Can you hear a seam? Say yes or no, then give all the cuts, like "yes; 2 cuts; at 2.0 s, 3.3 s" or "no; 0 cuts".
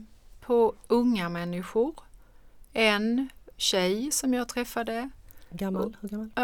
yes; 1 cut; at 3.5 s